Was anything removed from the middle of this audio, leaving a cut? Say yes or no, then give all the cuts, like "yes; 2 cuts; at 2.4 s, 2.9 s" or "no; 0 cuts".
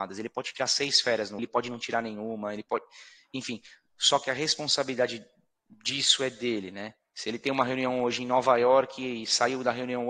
yes; 1 cut; at 1.4 s